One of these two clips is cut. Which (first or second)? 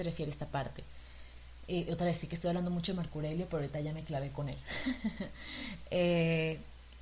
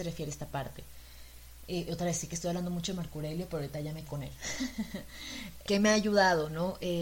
second